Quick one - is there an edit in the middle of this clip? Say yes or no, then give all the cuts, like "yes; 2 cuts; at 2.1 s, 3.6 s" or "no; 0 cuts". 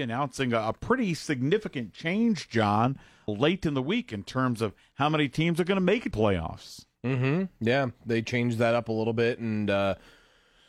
yes; 2 cuts; at 3.3 s, 6.1 s